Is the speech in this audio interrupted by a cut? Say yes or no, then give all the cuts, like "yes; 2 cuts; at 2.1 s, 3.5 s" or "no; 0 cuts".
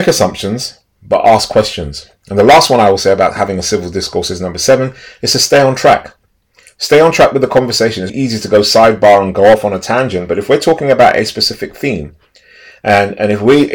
yes; 1 cut; at 8.1 s